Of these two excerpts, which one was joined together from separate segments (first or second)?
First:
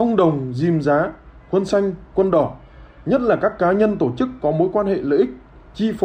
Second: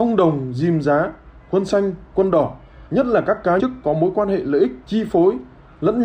second